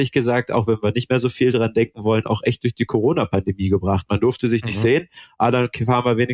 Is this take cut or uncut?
uncut